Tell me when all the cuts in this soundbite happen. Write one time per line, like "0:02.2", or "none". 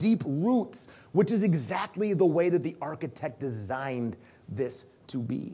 none